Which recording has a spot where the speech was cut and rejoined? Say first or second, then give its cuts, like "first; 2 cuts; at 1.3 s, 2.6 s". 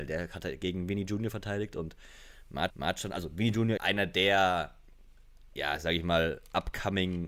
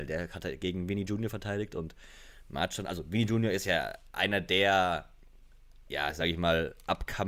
first; 2 cuts; at 2.7 s, 3.8 s